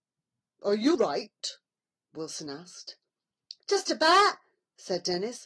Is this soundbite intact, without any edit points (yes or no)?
no